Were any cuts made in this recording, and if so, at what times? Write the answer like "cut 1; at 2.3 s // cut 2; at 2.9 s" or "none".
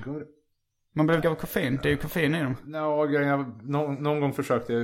cut 1; at 1.2 s